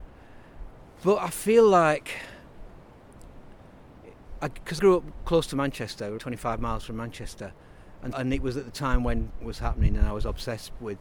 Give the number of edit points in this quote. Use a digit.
4